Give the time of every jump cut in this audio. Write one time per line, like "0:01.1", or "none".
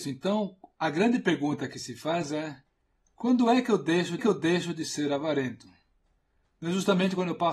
0:04.2